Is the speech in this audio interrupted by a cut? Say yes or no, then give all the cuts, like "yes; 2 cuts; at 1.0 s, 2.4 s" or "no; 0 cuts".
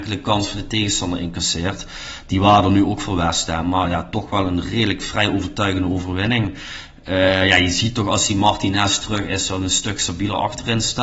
no; 0 cuts